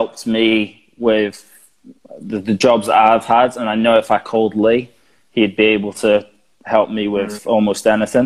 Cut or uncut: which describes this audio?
uncut